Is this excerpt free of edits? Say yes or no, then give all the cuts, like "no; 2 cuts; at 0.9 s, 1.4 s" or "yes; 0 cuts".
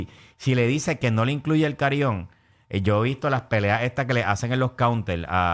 yes; 0 cuts